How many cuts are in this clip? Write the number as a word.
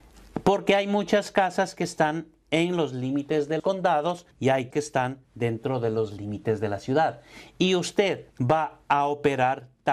five